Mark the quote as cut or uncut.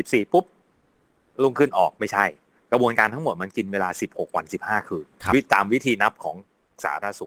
cut